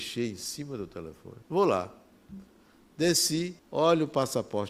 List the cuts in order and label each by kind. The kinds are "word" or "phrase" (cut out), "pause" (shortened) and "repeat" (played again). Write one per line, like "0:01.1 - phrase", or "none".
0:01.4 - pause
0:03.6 - pause